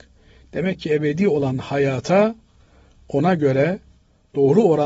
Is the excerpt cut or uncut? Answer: uncut